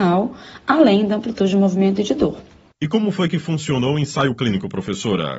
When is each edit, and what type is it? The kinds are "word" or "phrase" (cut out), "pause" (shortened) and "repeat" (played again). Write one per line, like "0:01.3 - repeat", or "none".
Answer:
none

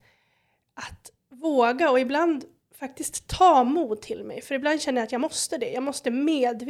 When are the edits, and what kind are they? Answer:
none

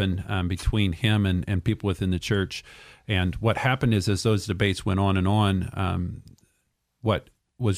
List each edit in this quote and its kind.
none

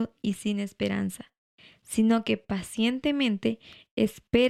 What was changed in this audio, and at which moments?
none

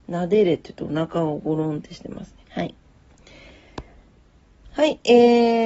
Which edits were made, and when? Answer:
0:02.4 - pause

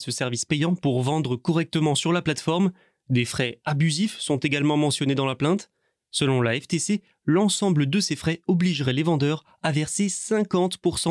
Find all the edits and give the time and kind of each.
none

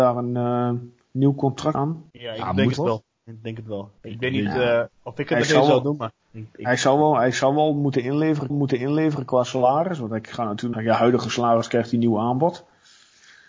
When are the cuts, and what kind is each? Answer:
0:01.7 - word
0:02.1 - pause
0:02.8 - word
0:04.0 - pause
0:04.9 - pause
0:06.2 - pause
0:08.5 - repeat
0:10.7 - phrase

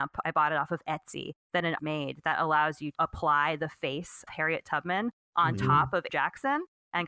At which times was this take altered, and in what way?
0:01.8 - word
0:02.9 - word
0:04.3 - word
0:06.1 - word

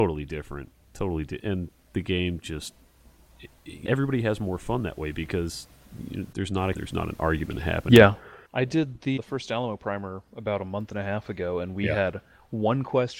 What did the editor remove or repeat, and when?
0:01.4 - word
0:03.8 - phrase
0:06.3 - word
0:06.7 - word
0:08.4 - pause
0:09.2 - word

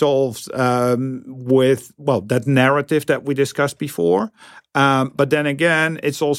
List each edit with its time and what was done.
none

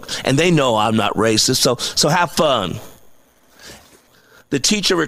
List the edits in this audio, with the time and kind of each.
none

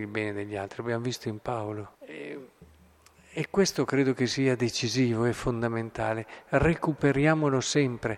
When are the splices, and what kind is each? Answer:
0:01.9 - pause

